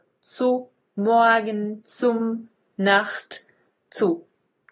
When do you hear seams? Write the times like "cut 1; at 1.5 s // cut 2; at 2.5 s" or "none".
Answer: cut 1; at 2.7 s